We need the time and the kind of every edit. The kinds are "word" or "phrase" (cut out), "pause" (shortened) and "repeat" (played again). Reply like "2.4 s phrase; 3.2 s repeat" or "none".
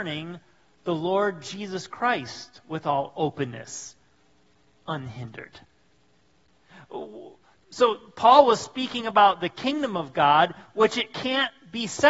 none